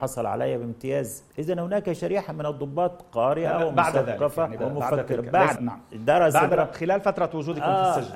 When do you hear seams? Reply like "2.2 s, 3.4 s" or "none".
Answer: 1.3 s, 4.6 s, 5.6 s, 6.5 s